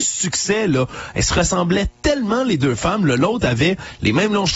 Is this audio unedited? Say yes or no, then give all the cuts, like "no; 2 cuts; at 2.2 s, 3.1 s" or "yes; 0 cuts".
yes; 0 cuts